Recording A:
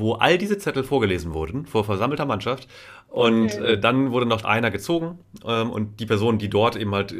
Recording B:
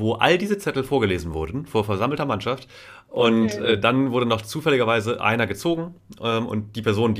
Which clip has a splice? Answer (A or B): A